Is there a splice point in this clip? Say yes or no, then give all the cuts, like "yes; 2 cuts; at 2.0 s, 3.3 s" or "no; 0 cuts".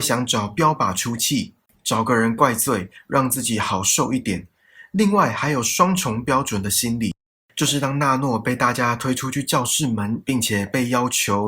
no; 0 cuts